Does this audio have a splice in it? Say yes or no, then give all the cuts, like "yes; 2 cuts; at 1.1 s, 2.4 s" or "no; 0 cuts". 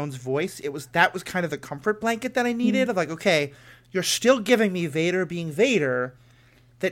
no; 0 cuts